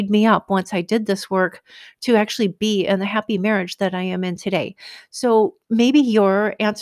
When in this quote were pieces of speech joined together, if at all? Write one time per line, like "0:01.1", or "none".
0:05.6

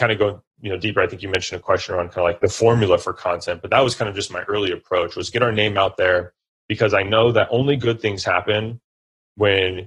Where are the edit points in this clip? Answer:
none

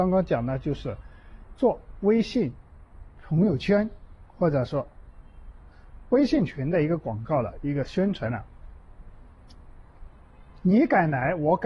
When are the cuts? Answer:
none

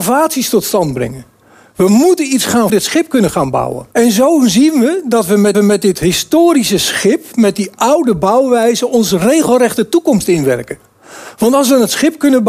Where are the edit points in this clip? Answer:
0:02.7
0:03.9
0:05.5

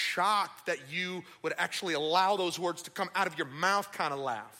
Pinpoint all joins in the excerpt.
none

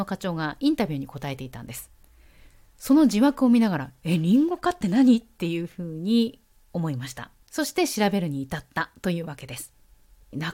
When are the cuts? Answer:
none

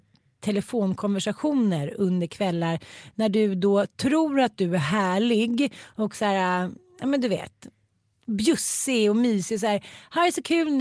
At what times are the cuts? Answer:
none

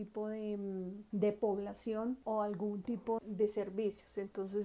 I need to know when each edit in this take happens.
0:03.2

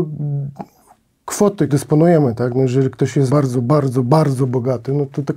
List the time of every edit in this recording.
0:01.7
0:03.3

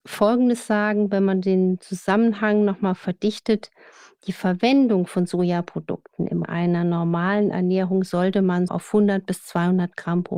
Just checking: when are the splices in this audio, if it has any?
0:06.4
0:08.7

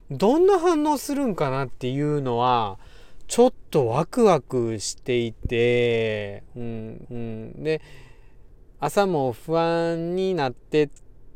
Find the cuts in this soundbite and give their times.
0:07.0

